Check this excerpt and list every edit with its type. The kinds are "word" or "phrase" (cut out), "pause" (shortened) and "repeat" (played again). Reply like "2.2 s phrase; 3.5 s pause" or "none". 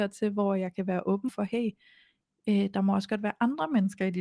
1.3 s word